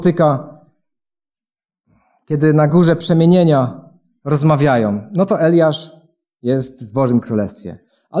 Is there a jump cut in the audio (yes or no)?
no